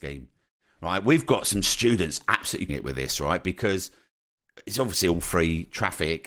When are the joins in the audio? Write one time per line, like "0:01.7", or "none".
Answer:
0:02.7

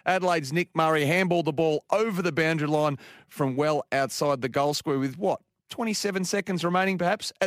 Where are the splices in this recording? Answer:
none

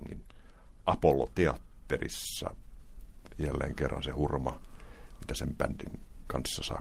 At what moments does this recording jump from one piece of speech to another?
none

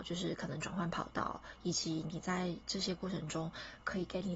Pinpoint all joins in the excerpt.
none

